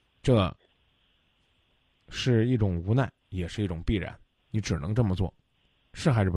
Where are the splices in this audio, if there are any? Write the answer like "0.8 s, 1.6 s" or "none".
3.2 s